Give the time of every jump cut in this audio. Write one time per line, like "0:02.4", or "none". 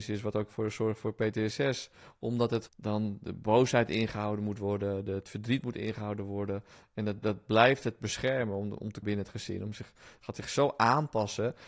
0:02.7
0:07.2
0:09.0